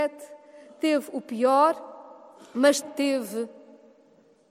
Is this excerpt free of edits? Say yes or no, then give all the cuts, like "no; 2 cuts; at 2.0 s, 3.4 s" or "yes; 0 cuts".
no; 1 cut; at 2.8 s